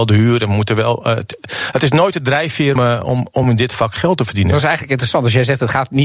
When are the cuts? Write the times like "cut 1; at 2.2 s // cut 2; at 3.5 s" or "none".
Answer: cut 1; at 2.8 s // cut 2; at 3.4 s